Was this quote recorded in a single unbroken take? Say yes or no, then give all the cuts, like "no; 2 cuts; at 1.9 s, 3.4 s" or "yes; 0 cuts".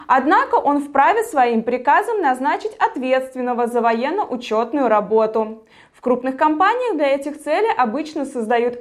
yes; 0 cuts